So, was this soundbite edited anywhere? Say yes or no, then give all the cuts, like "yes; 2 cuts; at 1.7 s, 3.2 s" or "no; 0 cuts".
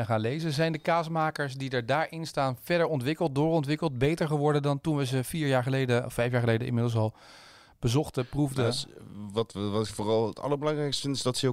no; 0 cuts